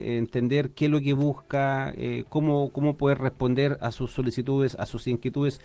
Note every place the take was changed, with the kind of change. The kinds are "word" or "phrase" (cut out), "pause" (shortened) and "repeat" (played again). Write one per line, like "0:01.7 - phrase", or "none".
none